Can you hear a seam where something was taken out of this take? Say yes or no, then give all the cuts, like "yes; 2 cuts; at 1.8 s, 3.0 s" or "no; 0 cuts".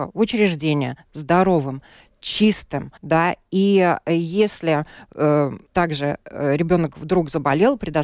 yes; 2 cuts; at 3.0 s, 5.7 s